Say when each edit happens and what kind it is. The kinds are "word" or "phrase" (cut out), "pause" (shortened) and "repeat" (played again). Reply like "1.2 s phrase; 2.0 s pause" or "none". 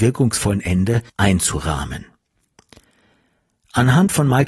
1.1 s pause